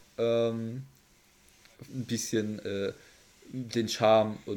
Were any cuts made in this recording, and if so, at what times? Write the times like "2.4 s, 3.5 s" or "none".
1.9 s